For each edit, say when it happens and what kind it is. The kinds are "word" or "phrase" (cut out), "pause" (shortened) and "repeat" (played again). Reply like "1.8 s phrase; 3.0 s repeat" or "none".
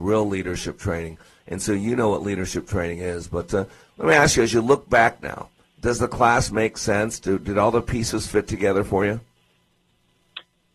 none